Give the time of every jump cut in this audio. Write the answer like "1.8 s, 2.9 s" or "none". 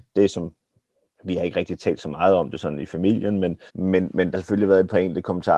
3.7 s, 4.3 s